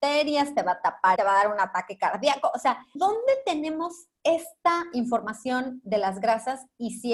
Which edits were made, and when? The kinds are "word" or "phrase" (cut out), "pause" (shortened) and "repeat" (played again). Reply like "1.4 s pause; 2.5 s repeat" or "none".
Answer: 1.2 s word; 3.0 s word